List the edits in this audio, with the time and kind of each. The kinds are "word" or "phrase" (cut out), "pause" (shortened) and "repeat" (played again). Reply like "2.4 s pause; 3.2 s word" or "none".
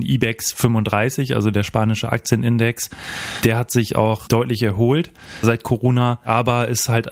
none